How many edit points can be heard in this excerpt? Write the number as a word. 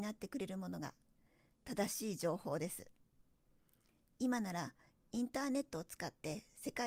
zero